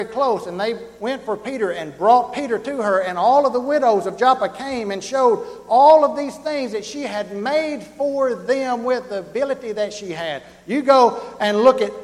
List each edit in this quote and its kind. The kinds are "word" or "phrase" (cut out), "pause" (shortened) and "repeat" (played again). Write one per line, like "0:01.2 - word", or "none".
none